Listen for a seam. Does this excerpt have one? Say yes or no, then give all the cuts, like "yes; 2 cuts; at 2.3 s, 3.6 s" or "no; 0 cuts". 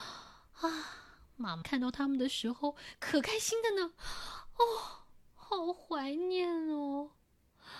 yes; 1 cut; at 1.6 s